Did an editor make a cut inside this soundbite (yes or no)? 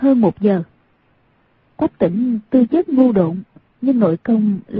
no